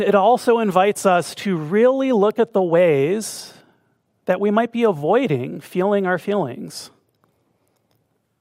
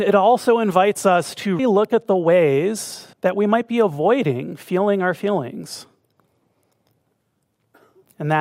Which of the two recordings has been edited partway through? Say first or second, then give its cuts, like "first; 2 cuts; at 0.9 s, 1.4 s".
second; 2 cuts; at 1.6 s, 3.1 s